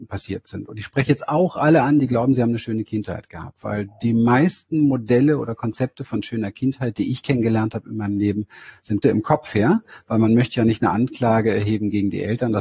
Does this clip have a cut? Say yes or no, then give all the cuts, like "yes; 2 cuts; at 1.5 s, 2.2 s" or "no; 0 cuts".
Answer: yes; 1 cut; at 9.0 s